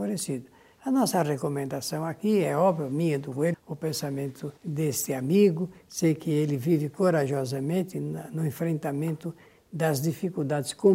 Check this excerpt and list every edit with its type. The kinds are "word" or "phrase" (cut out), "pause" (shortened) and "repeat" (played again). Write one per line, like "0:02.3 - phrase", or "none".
0:03.5 - phrase
0:04.6 - pause